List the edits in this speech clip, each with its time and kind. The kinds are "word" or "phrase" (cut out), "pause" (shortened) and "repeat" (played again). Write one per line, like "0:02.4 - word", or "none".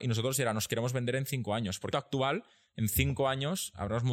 0:01.9 - phrase